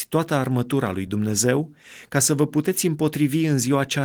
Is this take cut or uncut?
uncut